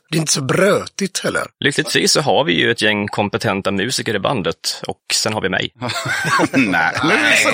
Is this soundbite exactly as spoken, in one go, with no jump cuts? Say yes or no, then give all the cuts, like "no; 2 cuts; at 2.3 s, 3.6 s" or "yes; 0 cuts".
yes; 0 cuts